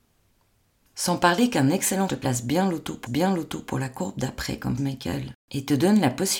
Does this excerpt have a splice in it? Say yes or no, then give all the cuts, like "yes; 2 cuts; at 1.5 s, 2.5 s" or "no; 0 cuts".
yes; 4 cuts; at 2.1 s, 3.1 s, 4.8 s, 5.4 s